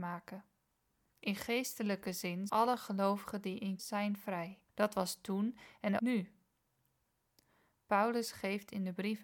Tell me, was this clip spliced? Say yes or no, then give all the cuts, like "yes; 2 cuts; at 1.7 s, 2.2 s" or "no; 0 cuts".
yes; 4 cuts; at 2.5 s, 3.8 s, 4.7 s, 6.0 s